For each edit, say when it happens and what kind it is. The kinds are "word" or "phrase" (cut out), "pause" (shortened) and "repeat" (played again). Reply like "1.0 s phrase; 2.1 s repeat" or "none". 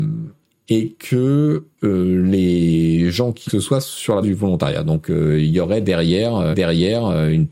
1.7 s pause; 3.5 s phrase; 4.2 s word; 6.5 s repeat